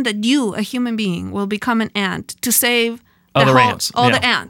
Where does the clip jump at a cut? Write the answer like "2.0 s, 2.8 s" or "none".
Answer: none